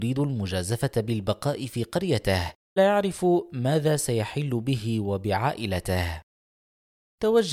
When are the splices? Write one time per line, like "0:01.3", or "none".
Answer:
0:02.8